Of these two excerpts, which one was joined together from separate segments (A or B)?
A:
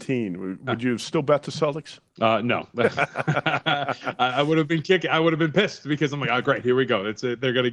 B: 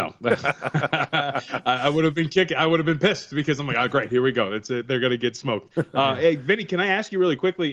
A